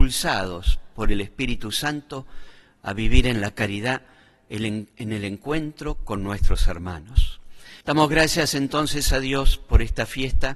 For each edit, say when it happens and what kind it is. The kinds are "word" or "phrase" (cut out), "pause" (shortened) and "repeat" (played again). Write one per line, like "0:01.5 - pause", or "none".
0:07.8 - pause